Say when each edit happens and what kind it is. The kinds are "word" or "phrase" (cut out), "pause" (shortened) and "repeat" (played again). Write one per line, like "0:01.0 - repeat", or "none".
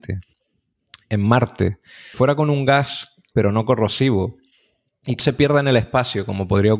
0:02.1 - word
0:03.3 - word
0:05.2 - word